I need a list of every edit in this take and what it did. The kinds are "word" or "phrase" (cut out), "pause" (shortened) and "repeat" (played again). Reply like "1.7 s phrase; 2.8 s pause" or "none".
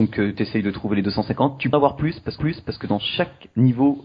1.7 s word; 2.4 s repeat